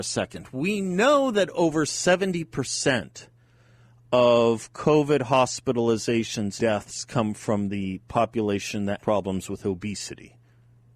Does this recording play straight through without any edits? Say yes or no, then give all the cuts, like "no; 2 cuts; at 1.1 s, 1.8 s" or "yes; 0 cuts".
no; 2 cuts; at 6.6 s, 9.0 s